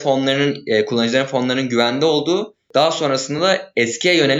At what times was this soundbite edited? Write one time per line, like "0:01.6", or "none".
none